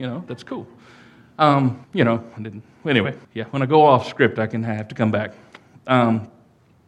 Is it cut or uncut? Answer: cut